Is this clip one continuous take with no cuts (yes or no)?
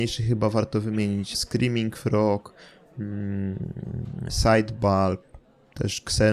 no